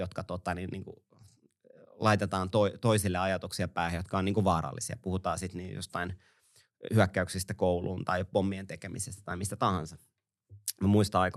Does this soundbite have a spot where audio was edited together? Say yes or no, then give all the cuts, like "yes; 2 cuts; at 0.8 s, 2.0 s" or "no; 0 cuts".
no; 0 cuts